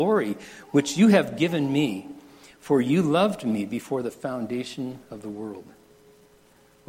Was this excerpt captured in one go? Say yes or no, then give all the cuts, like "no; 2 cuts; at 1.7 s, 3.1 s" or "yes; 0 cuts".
yes; 0 cuts